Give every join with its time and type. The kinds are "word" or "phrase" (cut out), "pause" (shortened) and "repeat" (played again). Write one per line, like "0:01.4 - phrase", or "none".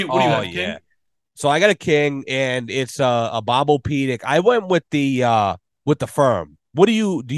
none